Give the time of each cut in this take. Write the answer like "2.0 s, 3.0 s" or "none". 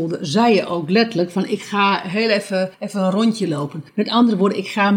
2.7 s, 3.9 s